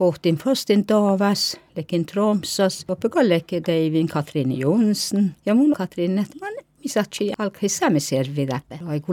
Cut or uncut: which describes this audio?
cut